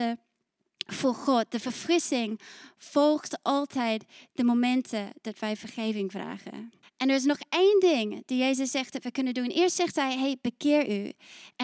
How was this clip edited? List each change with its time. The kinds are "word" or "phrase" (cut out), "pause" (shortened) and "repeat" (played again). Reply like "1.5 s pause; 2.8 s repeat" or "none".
6.8 s pause